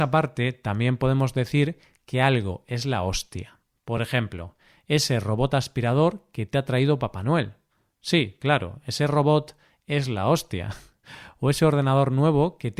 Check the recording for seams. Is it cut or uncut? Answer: uncut